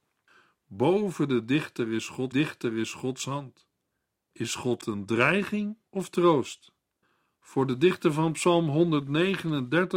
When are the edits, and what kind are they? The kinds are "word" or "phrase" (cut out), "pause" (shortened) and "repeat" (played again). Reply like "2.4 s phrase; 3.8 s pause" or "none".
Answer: 2.3 s repeat; 4.8 s word; 5.9 s pause

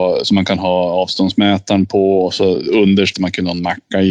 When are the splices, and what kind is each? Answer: 3.1 s phrase

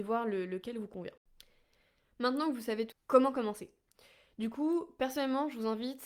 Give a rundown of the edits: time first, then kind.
2.9 s word

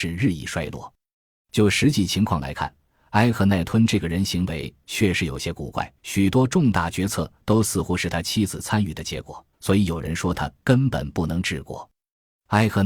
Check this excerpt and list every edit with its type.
6.0 s pause; 9.5 s pause

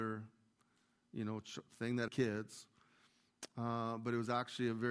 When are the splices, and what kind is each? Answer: 2.1 s phrase

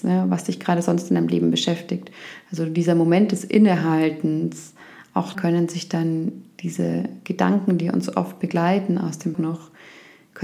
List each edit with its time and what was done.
5.3 s word; 9.3 s word

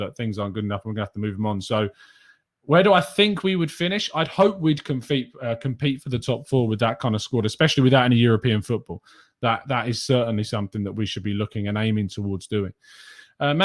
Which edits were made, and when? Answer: none

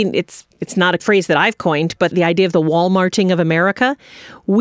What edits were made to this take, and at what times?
2.1 s word

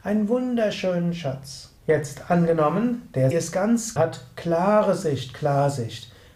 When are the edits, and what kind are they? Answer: 1.8 s pause; 3.3 s word; 4.0 s phrase

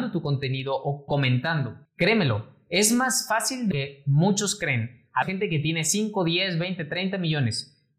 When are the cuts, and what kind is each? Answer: 1.1 s word; 3.7 s word; 5.2 s phrase

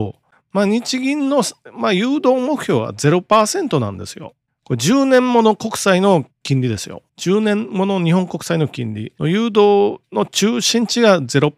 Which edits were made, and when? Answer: 7.1 s pause; 9.2 s pause

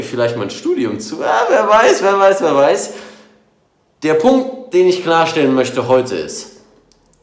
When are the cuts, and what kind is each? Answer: none

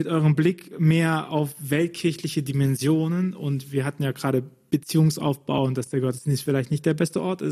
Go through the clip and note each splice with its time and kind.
none

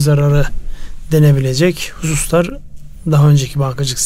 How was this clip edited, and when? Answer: none

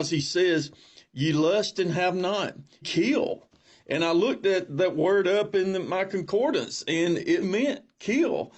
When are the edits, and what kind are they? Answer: 2.8 s word; 7.4 s word

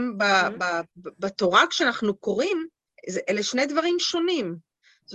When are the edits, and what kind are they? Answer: 0.9 s pause; 2.9 s pause

